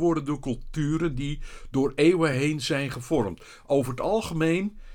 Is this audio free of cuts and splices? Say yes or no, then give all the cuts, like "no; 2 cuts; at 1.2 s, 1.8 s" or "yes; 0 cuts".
yes; 0 cuts